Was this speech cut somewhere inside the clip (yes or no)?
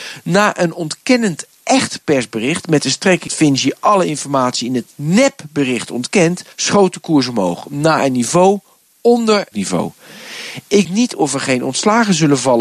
yes